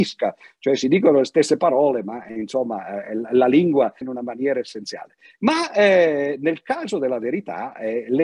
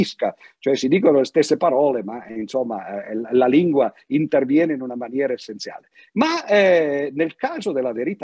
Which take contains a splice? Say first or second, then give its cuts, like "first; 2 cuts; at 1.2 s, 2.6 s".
first; 1 cut; at 4.0 s